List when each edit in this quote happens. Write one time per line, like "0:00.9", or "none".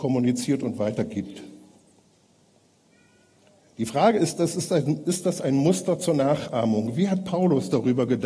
none